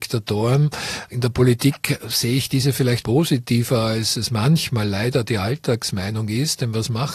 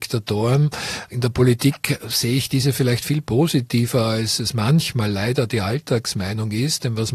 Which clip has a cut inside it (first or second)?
first